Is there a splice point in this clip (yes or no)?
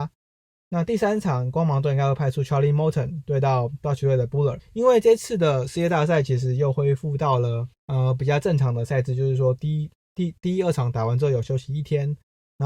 yes